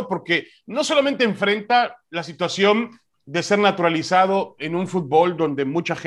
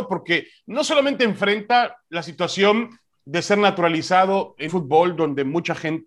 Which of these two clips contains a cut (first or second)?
second